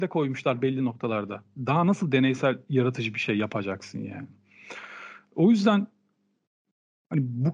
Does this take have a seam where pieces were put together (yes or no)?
no